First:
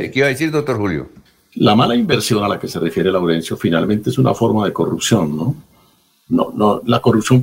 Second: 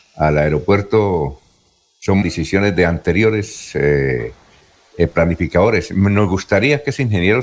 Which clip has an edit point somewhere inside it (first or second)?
second